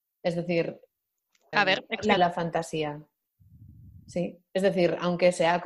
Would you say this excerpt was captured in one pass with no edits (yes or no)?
no